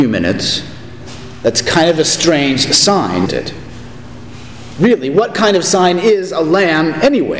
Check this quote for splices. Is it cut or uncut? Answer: cut